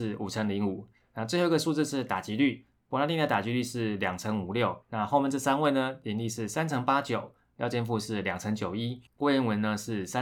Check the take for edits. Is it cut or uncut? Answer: cut